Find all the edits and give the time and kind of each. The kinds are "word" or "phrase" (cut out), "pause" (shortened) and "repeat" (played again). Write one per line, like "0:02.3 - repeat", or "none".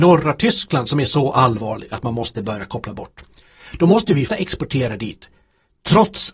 0:04.3 - word